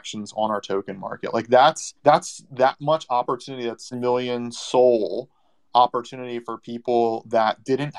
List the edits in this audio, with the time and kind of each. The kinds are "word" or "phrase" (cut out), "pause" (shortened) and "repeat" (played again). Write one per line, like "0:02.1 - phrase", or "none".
0:02.0 - pause
0:03.9 - phrase